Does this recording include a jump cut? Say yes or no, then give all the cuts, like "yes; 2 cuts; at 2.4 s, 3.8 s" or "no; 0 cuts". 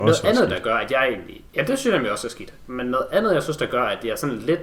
yes; 1 cut; at 1.5 s